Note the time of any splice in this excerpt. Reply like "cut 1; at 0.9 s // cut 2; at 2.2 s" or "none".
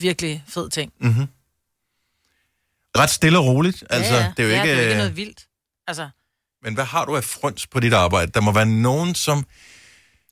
cut 1; at 3.0 s